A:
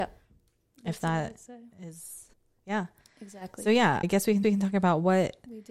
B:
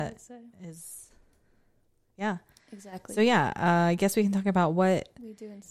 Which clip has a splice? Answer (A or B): A